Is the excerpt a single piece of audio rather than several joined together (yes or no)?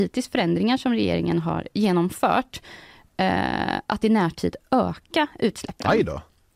yes